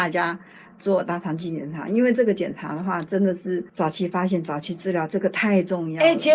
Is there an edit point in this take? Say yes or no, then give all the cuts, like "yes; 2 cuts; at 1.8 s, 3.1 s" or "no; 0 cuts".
yes; 1 cut; at 3.7 s